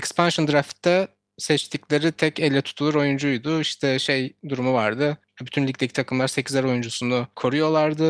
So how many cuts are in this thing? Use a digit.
0